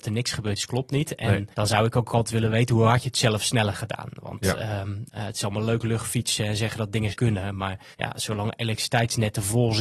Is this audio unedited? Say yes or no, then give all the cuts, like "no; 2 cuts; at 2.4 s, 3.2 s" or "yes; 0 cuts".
no; 3 cuts; at 1.5 s, 7.1 s, 7.9 s